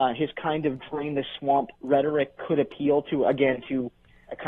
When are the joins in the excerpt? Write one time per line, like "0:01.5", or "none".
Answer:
0:01.7